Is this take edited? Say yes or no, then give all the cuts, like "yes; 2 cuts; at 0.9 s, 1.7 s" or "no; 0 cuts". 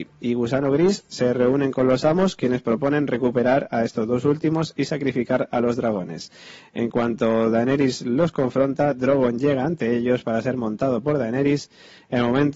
no; 0 cuts